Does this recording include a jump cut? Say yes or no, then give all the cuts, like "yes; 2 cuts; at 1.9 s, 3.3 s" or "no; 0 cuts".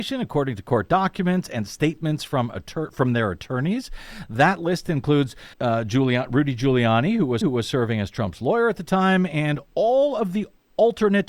yes; 2 cuts; at 5.5 s, 7.4 s